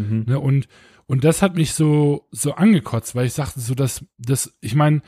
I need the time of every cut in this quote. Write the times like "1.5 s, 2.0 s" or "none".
none